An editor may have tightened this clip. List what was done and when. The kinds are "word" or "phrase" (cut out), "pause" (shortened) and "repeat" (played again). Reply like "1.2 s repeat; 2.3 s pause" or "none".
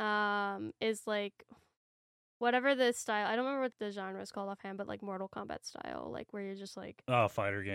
3.7 s word